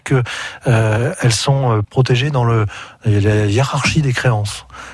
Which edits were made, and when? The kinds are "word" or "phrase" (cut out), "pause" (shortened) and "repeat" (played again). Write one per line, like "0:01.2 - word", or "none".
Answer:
0:01.8 - word